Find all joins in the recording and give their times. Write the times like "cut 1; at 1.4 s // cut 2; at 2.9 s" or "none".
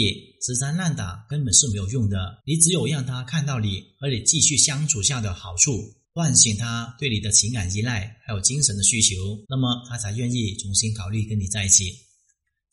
cut 1; at 2.4 s // cut 2; at 6.0 s // cut 3; at 9.4 s